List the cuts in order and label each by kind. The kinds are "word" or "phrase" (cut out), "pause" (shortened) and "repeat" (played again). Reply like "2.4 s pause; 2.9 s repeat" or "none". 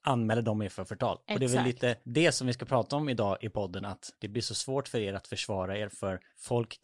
none